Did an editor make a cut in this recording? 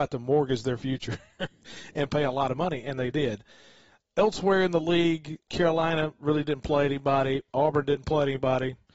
yes; 1 cut; at 5.5 s

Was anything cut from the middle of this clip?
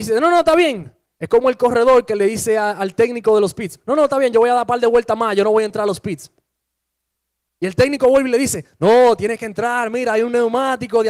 no; 0 cuts

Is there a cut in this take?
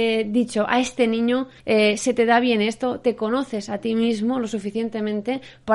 yes; 1 cut; at 1.6 s

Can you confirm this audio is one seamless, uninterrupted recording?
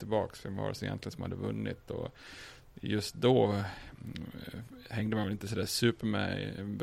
yes; 0 cuts

